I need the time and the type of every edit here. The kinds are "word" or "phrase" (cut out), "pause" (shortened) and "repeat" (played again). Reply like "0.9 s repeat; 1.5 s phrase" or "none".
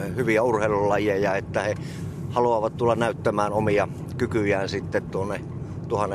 none